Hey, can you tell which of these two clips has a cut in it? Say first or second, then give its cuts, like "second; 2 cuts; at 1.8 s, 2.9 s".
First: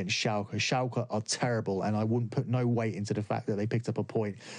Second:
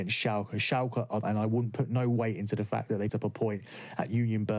second; 2 cuts; at 1.2 s, 3.1 s